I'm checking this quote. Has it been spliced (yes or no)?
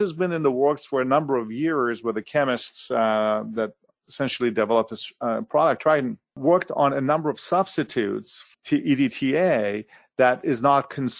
no